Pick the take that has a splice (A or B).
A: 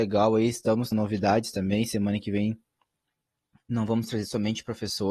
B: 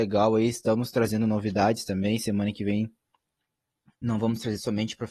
A